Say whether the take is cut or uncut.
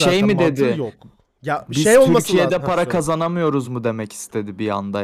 uncut